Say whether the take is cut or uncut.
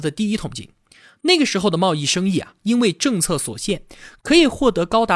uncut